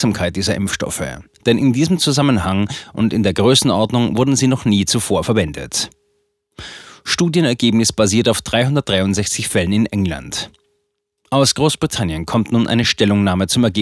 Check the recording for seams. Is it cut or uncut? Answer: uncut